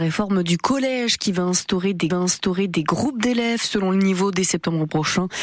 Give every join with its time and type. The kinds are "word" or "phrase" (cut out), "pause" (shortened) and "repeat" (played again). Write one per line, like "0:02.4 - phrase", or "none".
0:02.1 - repeat